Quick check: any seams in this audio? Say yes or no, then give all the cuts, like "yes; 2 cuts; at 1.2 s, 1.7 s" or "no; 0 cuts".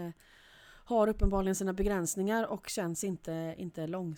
no; 0 cuts